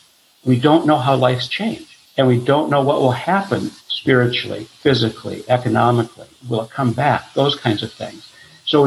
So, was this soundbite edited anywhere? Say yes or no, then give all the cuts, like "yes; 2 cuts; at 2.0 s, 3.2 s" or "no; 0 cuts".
yes; 2 cuts; at 2.0 s, 3.8 s